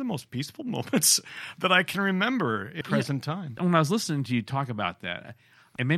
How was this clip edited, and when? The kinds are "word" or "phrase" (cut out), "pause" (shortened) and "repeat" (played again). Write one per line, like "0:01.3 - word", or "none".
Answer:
0:02.8 - word